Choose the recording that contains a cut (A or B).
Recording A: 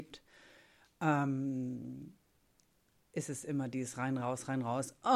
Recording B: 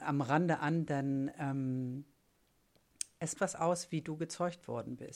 B